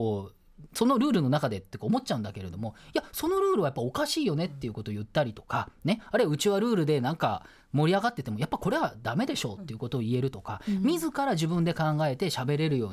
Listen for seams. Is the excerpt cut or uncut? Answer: uncut